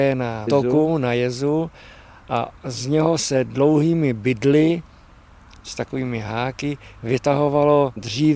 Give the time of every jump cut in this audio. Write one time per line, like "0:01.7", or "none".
none